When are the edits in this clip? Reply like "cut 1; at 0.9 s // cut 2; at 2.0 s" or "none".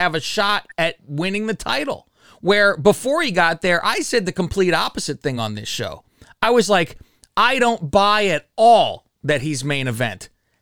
none